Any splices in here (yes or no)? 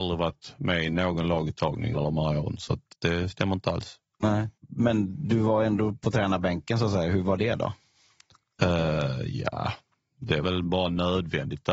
yes